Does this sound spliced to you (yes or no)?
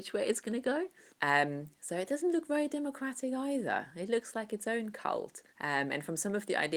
yes